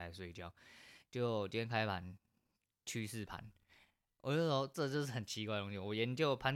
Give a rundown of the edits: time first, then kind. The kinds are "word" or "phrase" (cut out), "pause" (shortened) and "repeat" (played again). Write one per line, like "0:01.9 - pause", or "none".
none